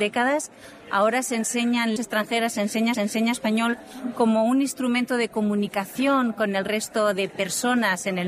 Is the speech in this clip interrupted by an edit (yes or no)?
yes